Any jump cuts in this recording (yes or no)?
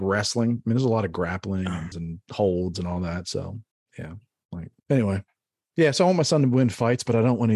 yes